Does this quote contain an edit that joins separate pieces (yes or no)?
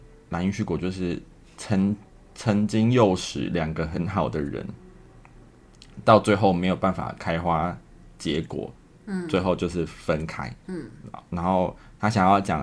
yes